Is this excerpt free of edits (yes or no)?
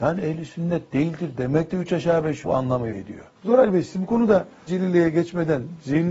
no